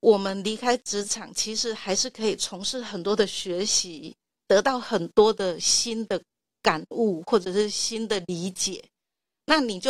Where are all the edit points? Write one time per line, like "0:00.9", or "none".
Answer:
none